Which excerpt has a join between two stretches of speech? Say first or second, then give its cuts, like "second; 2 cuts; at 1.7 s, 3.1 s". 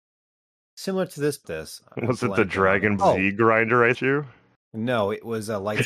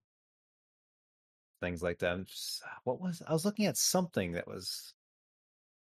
first; 3 cuts; at 1.4 s, 3.0 s, 3.9 s